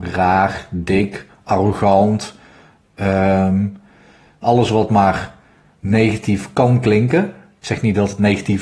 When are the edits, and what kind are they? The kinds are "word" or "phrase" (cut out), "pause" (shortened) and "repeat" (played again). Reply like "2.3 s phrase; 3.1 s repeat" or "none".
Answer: 4.4 s phrase

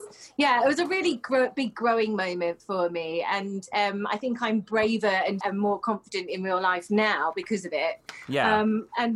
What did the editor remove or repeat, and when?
5.4 s word

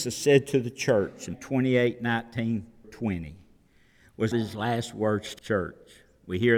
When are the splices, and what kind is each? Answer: 1.3 s word; 2.8 s word; 4.3 s word; 5.4 s word

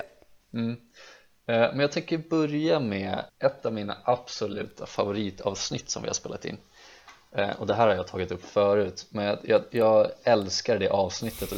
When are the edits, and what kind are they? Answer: 3.3 s pause

